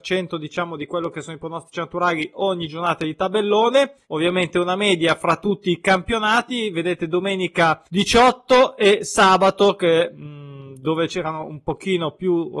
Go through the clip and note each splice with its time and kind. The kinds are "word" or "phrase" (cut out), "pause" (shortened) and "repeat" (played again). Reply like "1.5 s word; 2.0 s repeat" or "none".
4.0 s pause; 7.8 s pause